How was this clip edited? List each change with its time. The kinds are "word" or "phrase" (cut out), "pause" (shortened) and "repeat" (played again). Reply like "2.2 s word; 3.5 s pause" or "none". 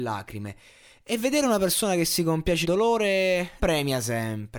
2.6 s word; 3.6 s word